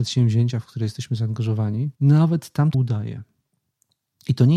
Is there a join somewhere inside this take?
yes; 2 cuts; at 1.9 s, 2.7 s

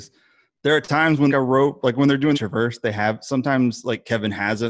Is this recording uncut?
no; 2 cuts; at 1.3 s, 2.3 s

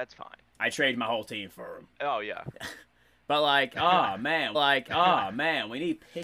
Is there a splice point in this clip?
yes; 2 cuts; at 1.9 s, 4.5 s

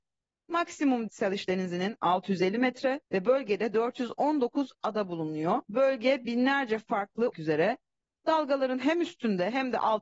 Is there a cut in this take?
yes; 4 cuts; at 1.1 s, 3.1 s, 5.6 s, 7.3 s

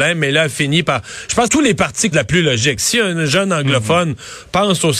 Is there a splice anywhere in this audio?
yes; 3 cuts; at 1.5 s, 2.1 s, 2.8 s

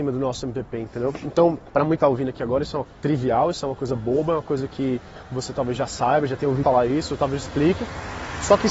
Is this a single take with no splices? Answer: no; 5 cuts; at 1.7 s, 2.0 s, 2.9 s, 6.6 s, 7.5 s

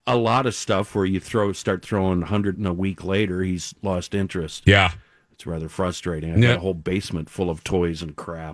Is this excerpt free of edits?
no; 1 cut; at 2.5 s

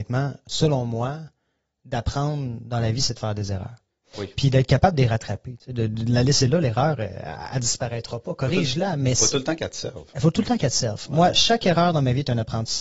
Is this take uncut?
yes; 0 cuts

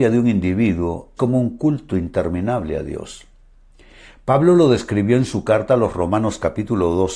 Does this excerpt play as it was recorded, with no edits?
no; 1 cut; at 1.2 s

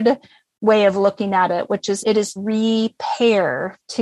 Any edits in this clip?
yes; 2 cuts; at 2.0 s, 2.4 s

